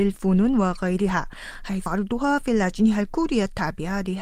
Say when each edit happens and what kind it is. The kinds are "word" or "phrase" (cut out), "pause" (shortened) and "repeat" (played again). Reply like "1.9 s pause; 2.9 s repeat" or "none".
1.9 s word